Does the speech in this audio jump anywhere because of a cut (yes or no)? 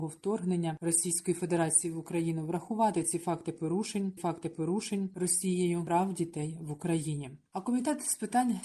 yes